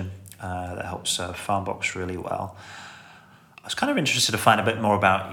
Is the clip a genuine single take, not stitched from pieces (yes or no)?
yes